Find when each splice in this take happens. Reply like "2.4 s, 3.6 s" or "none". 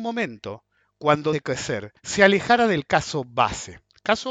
1.3 s, 2.0 s